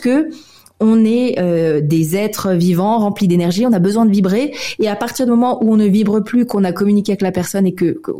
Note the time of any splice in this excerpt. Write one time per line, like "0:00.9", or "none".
none